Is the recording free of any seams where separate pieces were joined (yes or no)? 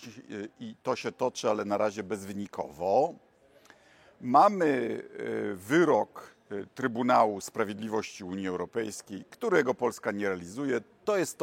yes